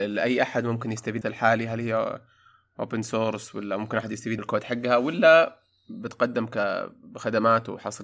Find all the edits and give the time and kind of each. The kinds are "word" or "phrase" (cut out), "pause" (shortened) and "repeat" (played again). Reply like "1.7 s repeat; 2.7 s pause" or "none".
1.2 s phrase; 4.4 s word